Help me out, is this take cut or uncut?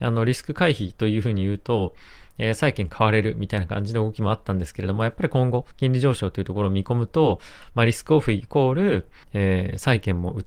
cut